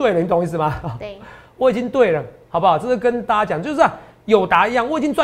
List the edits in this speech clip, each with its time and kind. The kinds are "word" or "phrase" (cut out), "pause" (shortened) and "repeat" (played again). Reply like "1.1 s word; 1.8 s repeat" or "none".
none